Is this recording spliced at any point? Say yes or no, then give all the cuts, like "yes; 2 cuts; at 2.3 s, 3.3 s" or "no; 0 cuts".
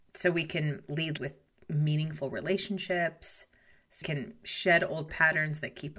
yes; 3 cuts; at 1.2 s, 4.0 s, 5.1 s